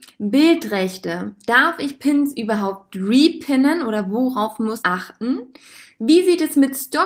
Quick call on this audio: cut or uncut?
cut